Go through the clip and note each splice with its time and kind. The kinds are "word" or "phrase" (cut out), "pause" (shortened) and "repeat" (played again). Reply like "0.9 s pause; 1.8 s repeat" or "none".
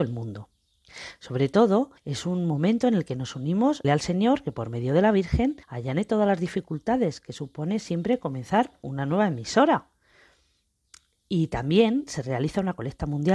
2.0 s pause; 3.8 s phrase; 5.6 s pause